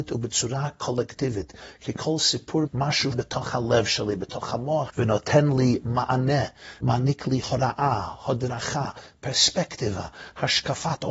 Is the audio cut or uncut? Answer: cut